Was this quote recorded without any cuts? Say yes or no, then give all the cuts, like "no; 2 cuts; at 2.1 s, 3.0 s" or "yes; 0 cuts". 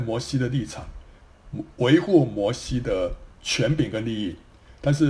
no; 1 cut; at 3.3 s